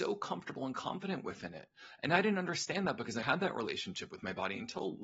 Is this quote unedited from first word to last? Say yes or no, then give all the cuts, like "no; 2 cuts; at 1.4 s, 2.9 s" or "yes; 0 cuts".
no; 1 cut; at 3.2 s